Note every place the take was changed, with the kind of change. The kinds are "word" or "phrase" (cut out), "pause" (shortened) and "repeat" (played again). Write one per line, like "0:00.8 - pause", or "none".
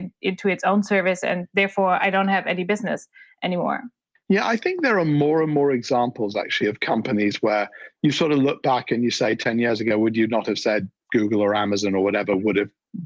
none